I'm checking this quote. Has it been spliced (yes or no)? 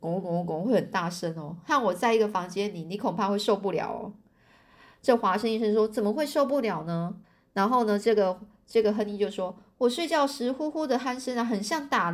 yes